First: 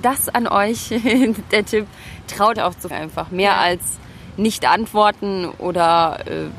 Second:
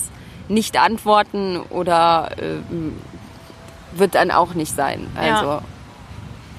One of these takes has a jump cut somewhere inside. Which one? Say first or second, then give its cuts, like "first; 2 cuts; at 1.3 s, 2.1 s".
first; 2 cuts; at 2.6 s, 2.9 s